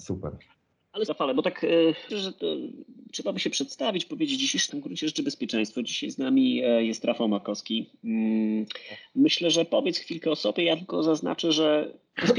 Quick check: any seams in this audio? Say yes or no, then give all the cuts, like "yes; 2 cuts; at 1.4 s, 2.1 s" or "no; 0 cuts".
yes; 3 cuts; at 1.1 s, 2.1 s, 4.7 s